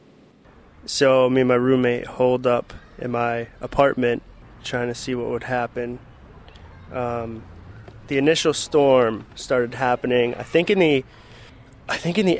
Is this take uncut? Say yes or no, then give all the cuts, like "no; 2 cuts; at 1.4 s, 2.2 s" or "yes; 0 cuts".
yes; 0 cuts